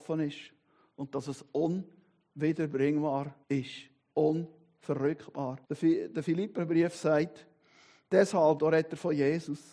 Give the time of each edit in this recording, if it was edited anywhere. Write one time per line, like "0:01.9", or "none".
0:03.4
0:05.6
0:08.6